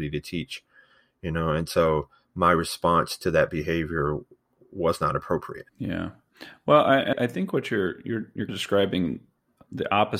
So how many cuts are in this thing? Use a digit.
3